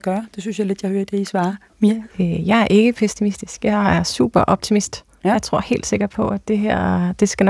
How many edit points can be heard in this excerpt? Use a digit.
1